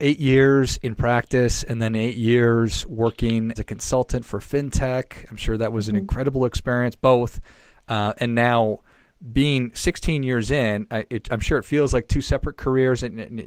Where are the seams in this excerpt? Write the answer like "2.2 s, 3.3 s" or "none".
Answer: 3.6 s